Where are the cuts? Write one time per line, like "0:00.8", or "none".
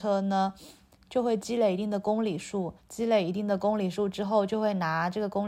0:02.8